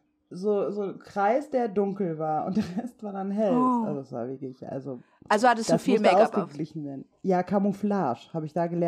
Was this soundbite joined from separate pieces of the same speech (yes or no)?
no